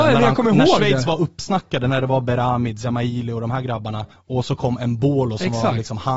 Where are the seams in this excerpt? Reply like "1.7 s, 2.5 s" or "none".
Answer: 4.1 s